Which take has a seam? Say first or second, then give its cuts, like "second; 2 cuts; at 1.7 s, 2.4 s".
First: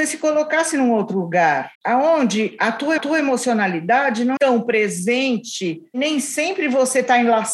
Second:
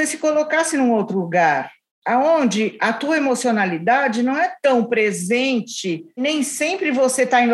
first; 3 cuts; at 1.7 s, 3.0 s, 4.4 s